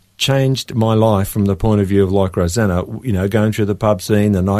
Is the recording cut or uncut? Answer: uncut